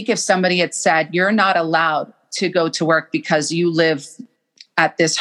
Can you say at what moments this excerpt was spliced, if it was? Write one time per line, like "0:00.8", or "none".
none